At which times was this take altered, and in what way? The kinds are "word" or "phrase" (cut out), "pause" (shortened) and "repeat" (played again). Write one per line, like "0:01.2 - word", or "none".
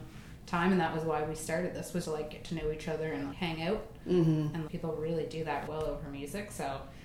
0:02.0 - word
0:03.3 - word
0:04.7 - word
0:05.7 - word